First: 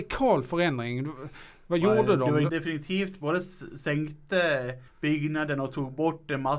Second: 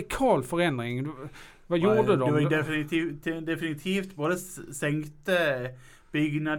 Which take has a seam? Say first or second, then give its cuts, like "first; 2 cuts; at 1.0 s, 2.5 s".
first; 2 cuts; at 2.5 s, 4.9 s